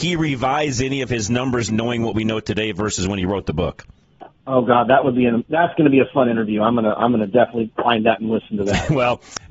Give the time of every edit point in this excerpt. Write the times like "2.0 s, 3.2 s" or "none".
1.7 s, 4.4 s, 7.7 s